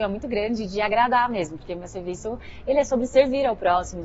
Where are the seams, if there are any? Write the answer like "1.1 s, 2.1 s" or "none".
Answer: none